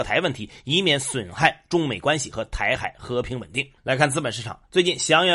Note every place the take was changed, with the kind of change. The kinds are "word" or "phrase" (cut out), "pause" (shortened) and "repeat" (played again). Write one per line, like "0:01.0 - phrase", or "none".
0:03.8 - pause